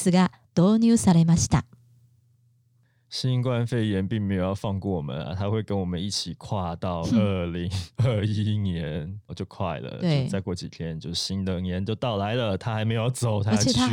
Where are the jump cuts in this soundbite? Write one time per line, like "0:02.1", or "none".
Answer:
0:09.3